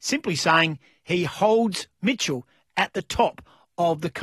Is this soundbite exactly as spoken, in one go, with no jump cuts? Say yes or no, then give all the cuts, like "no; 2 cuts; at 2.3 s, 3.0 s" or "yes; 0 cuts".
yes; 0 cuts